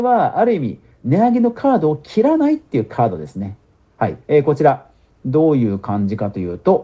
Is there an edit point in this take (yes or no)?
yes